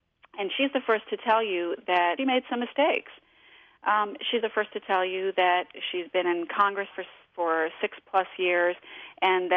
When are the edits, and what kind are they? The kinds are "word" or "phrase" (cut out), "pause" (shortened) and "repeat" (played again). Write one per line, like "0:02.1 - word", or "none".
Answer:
0:02.2 - word
0:04.4 - word
0:06.9 - word